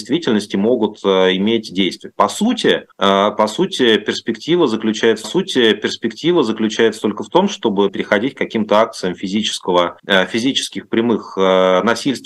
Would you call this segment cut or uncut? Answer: cut